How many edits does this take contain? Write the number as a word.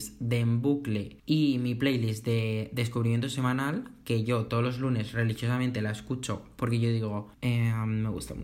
two